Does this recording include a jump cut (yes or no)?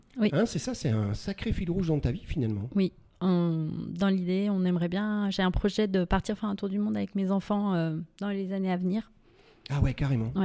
no